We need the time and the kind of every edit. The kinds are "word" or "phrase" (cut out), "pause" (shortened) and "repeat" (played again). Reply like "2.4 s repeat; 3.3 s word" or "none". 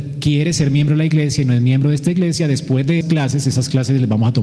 3.0 s word